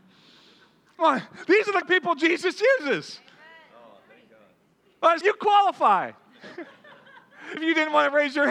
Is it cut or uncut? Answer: cut